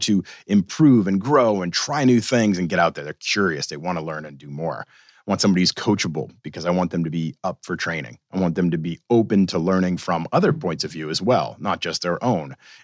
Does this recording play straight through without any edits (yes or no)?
yes